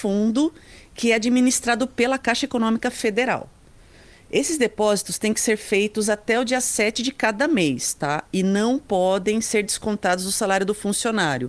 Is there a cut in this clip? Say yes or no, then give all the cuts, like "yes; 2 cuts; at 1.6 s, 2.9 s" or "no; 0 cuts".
no; 0 cuts